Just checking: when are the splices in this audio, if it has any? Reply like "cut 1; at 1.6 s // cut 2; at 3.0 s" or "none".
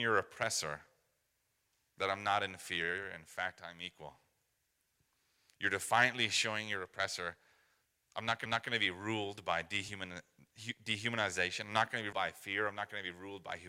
cut 1; at 8.5 s // cut 2; at 12.1 s